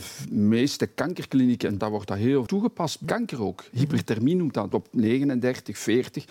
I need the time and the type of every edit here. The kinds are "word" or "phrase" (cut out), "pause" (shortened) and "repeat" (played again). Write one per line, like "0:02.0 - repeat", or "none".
0:01.8 - word
0:02.5 - word
0:03.0 - word
0:04.7 - word